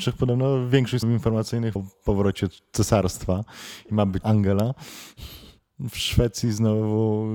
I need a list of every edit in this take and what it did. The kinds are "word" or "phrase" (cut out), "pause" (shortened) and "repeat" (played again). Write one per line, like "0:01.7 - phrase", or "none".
0:01.0 - word
0:01.8 - word
0:04.2 - word